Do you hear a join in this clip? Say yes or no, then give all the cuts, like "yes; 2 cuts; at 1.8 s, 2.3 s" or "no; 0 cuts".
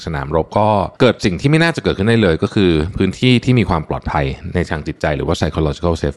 yes; 1 cut; at 1.0 s